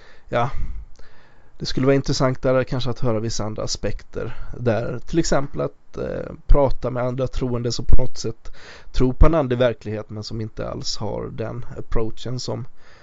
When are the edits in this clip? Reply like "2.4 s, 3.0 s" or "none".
none